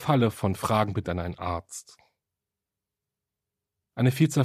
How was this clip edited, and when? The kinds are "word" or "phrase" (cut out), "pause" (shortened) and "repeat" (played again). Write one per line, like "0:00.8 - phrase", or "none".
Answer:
0:01.0 - word